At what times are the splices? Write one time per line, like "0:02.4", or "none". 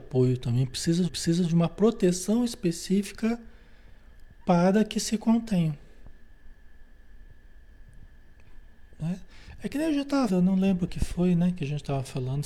0:01.1
0:10.3
0:10.9